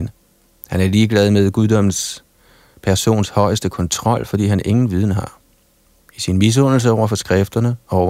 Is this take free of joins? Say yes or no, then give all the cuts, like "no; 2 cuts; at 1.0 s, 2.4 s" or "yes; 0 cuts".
yes; 0 cuts